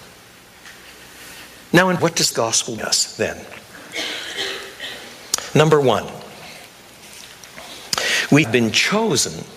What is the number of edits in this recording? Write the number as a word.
four